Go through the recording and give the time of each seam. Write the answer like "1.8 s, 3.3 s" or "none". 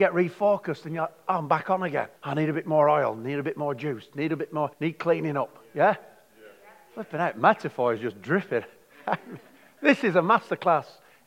2.2 s, 4.7 s